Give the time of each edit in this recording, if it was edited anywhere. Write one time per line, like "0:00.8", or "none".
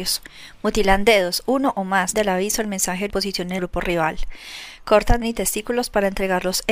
0:02.1
0:03.1
0:03.6
0:05.2